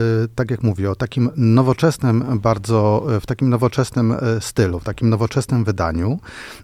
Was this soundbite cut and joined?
no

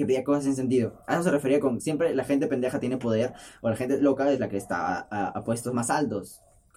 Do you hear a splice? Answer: no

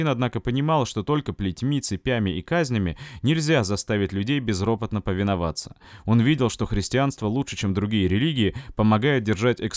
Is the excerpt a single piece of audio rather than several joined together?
yes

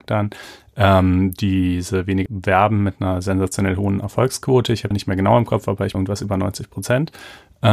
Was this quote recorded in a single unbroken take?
no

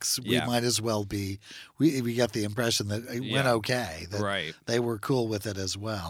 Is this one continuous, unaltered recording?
yes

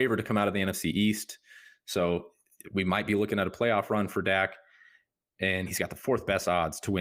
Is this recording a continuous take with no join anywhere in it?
yes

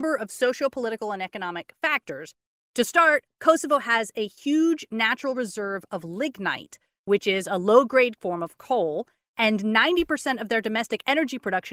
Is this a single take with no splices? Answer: yes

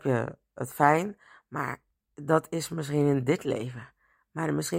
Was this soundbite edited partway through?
no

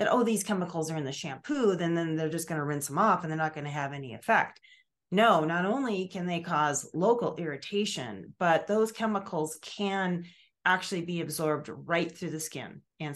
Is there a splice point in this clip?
no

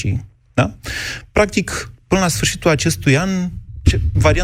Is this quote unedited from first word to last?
yes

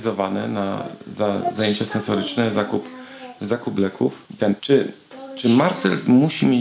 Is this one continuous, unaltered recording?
no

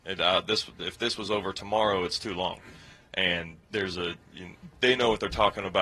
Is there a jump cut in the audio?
no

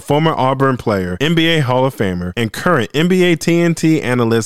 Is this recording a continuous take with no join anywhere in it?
yes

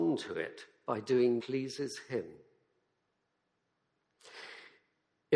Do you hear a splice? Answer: yes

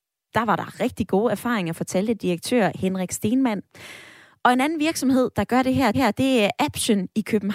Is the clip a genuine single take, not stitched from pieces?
no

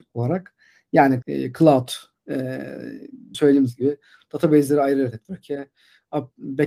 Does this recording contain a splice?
yes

